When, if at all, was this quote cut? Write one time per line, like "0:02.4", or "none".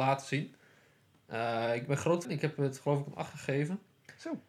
0:02.2